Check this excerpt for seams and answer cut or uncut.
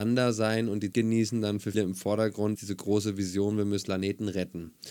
cut